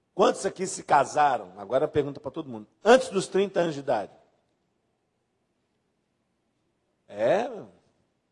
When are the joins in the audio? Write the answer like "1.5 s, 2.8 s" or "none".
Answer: none

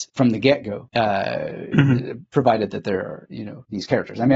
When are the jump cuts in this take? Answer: 2.3 s

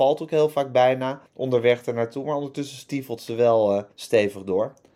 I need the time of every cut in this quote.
1.3 s, 3.9 s

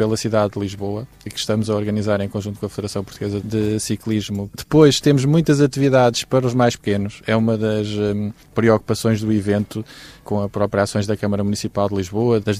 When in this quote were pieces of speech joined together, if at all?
8.4 s

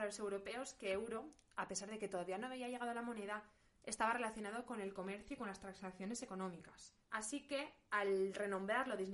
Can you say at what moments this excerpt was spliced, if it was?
7.0 s

